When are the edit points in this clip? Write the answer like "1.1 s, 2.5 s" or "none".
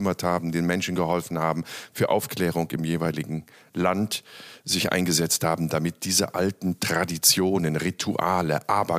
none